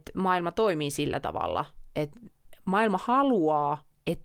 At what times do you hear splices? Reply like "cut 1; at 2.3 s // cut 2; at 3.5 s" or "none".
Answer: cut 1; at 1.9 s